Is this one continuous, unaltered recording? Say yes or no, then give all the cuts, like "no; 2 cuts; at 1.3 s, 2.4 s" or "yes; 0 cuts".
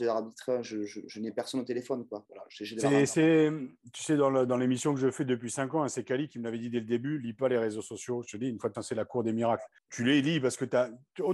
no; 2 cuts; at 8.7 s, 9.8 s